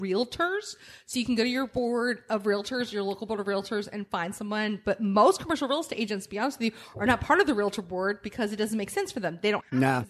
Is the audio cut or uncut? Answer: uncut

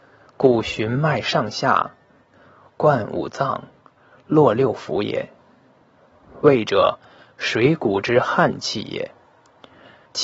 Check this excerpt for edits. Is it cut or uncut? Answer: uncut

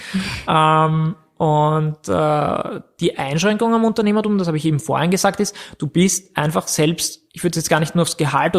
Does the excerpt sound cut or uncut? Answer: cut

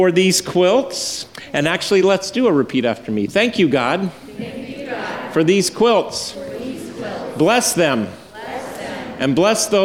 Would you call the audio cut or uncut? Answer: uncut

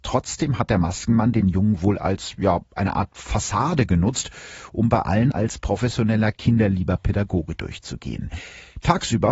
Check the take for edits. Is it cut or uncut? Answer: uncut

